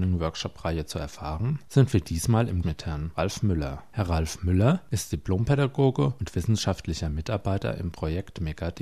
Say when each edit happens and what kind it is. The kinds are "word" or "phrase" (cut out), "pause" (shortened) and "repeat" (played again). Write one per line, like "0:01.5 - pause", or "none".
0:02.6 - word